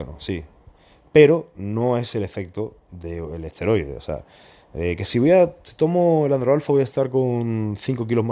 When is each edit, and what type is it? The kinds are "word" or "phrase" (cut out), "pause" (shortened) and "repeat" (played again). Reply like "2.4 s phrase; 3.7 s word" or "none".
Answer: none